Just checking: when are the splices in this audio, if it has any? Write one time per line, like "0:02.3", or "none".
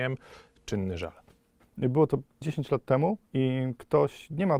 0:02.4
0:03.2